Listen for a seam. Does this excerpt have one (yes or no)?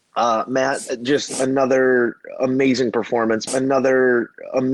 yes